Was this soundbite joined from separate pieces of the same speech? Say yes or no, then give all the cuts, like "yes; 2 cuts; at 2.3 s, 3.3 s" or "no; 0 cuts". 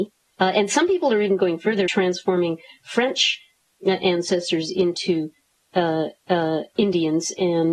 yes; 2 cuts; at 1.9 s, 6.2 s